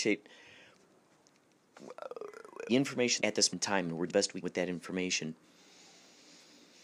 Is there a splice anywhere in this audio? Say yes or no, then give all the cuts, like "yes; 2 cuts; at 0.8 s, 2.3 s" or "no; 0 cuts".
yes; 5 cuts; at 2.7 s, 3.2 s, 3.5 s, 4.1 s, 4.4 s